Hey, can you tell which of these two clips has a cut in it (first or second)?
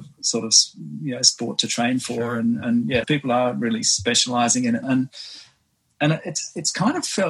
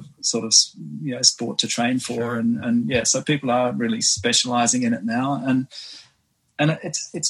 first